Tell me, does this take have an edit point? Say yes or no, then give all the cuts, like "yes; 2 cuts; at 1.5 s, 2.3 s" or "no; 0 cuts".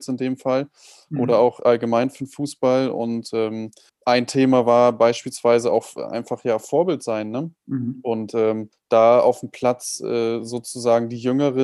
yes; 3 cuts; at 3.9 s, 7.6 s, 8.7 s